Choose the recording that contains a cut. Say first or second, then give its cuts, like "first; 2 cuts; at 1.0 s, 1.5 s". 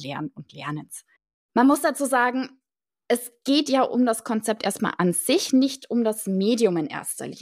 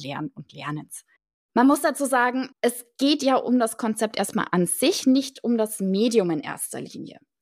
second; 1 cut; at 2.5 s